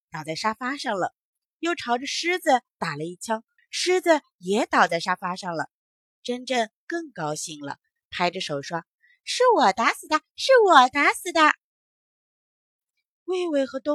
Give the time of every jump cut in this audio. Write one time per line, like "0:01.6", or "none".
0:03.6